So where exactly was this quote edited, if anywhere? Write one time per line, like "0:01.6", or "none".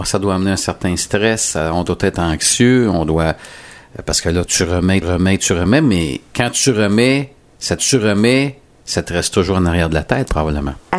0:04.5
0:05.0
0:07.8